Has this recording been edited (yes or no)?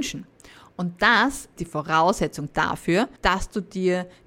yes